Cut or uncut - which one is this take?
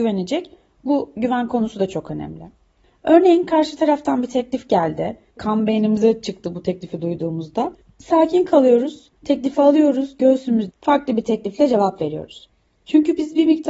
cut